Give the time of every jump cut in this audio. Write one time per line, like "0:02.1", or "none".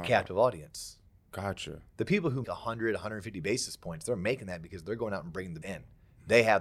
0:02.4
0:05.6